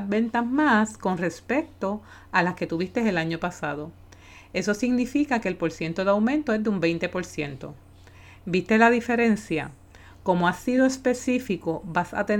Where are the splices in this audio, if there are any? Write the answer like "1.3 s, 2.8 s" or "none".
none